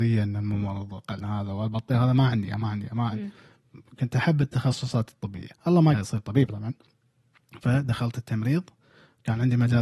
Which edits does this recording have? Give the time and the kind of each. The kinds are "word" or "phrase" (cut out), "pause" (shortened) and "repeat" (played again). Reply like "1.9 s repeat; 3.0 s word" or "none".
1.2 s word; 5.5 s pause; 5.9 s word